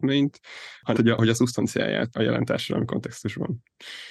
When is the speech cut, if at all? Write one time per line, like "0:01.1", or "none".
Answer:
0:01.0
0:02.1